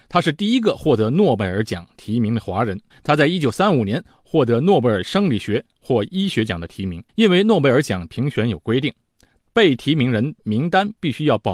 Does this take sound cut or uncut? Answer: cut